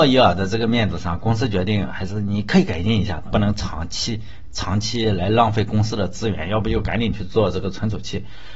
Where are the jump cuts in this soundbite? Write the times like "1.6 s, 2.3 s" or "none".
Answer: 3.3 s